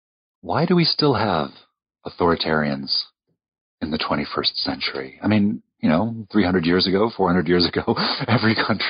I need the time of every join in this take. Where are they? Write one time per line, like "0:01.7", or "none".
none